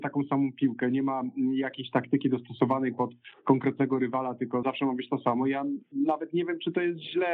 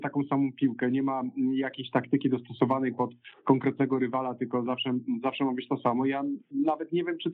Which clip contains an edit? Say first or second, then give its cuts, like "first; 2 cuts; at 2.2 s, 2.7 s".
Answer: first; 1 cut; at 4.6 s